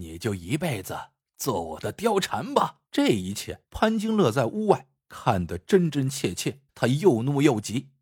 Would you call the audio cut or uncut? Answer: cut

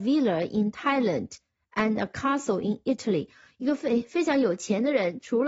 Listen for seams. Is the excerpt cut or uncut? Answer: uncut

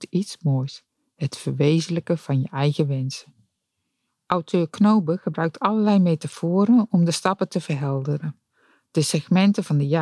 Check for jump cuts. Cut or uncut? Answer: uncut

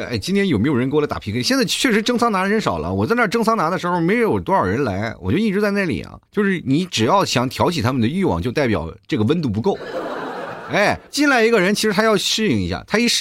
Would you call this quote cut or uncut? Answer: cut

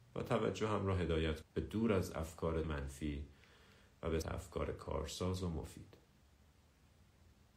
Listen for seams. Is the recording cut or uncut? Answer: cut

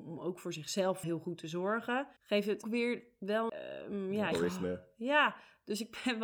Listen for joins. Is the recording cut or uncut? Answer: cut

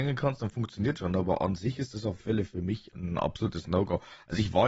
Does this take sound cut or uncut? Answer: cut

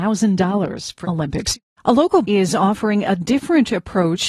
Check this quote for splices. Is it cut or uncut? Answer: cut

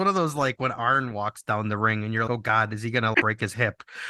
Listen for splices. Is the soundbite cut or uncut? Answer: cut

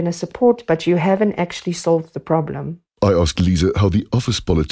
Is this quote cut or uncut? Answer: cut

